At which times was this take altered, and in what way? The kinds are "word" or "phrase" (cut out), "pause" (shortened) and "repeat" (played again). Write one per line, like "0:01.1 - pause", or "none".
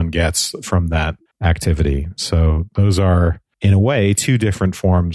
0:01.3 - phrase